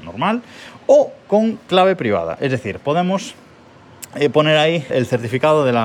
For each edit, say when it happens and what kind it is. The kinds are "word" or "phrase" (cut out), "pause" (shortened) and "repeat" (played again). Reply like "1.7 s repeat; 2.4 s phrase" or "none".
4.9 s word

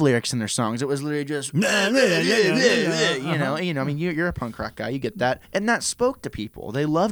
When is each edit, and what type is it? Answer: 5.4 s pause

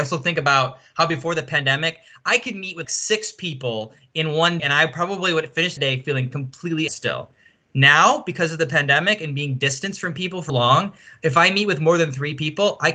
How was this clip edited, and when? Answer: 2.8 s word; 4.6 s word; 5.8 s word; 6.9 s word; 10.5 s word

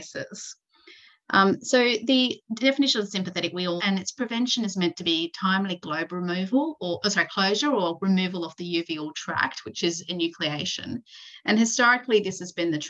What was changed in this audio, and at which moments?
3.8 s word

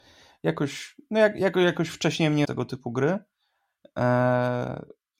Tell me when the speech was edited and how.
2.4 s word

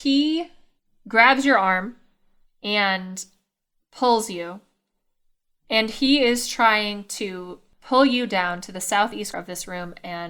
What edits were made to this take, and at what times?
9.3 s word

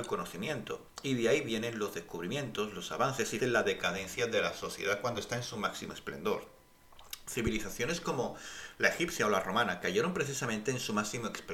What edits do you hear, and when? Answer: 3.4 s word

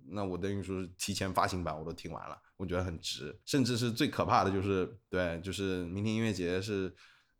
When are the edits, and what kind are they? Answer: 3.4 s pause

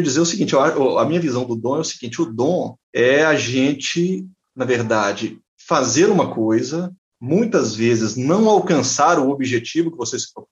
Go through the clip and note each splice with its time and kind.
2.8 s pause; 4.4 s pause; 5.5 s pause; 7.0 s pause

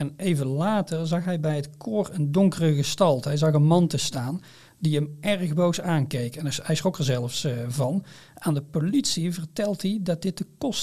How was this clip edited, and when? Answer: none

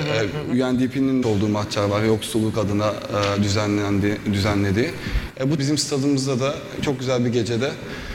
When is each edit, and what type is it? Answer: 1.2 s phrase; 5.6 s phrase

